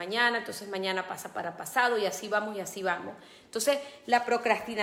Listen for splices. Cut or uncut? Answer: uncut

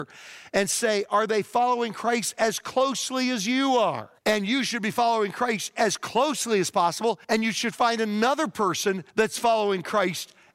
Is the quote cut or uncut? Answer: cut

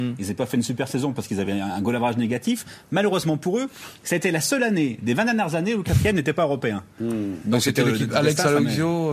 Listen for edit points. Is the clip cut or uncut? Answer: uncut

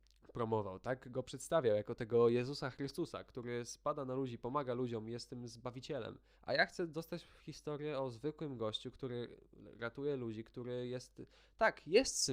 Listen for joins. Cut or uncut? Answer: cut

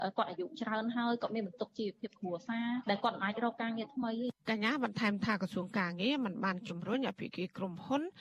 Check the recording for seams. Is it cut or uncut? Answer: cut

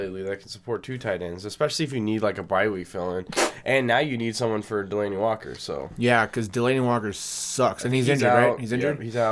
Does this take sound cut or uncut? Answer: uncut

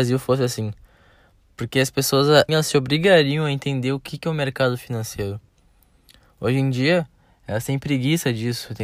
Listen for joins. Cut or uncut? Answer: cut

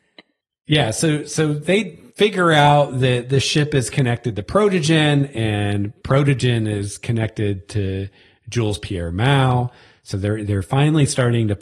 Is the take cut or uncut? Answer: uncut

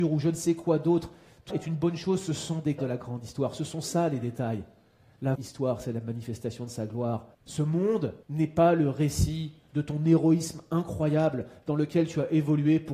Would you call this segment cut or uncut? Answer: cut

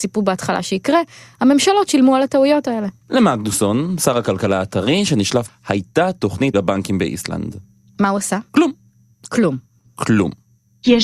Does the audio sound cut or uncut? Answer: cut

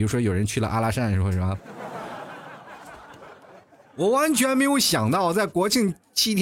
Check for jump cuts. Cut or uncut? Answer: cut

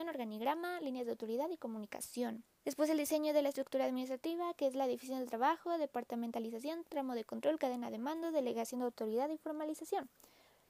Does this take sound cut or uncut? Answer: cut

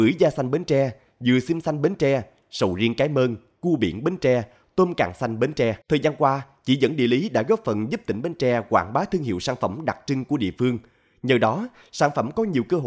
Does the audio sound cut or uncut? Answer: cut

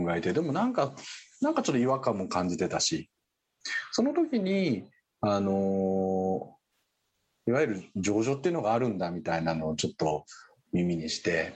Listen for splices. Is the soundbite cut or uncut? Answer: uncut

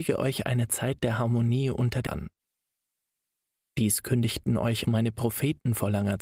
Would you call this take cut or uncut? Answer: cut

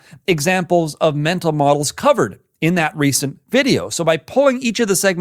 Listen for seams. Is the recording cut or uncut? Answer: uncut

